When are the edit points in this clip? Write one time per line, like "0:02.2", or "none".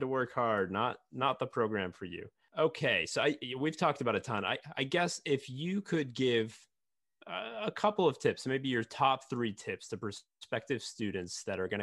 none